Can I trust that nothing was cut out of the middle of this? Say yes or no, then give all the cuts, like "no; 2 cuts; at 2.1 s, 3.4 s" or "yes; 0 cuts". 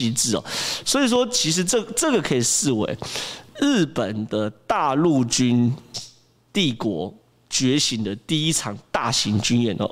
yes; 0 cuts